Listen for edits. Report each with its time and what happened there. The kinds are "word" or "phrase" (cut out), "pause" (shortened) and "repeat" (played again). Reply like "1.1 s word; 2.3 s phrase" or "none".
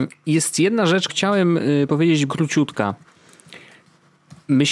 1.1 s word; 2.3 s word